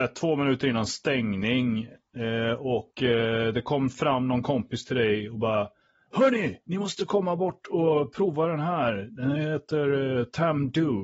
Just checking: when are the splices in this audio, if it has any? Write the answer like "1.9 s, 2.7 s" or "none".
none